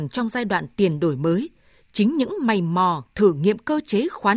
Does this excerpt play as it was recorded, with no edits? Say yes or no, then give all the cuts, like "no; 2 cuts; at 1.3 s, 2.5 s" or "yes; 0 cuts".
yes; 0 cuts